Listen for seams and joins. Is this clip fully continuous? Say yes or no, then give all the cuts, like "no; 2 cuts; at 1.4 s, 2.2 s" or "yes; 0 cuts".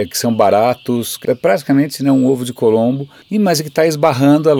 no; 2 cuts; at 1.2 s, 3.2 s